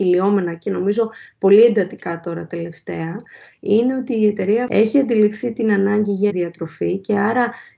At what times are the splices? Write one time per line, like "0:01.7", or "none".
0:06.3